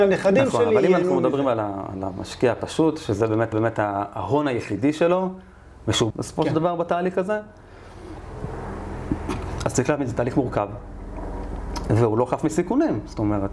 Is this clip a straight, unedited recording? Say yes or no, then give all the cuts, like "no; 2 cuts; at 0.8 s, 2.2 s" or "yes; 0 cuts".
no; 2 cuts; at 3.5 s, 6.1 s